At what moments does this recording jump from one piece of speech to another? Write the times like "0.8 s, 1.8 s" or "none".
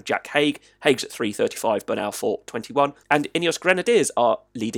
3.0 s

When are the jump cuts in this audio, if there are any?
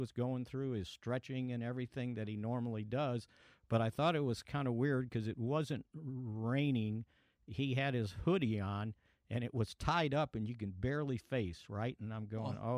11.2 s

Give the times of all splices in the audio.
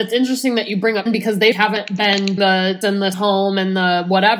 1.1 s, 1.5 s, 2.4 s, 2.8 s, 3.1 s

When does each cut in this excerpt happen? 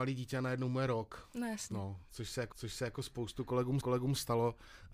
2.5 s, 3.8 s

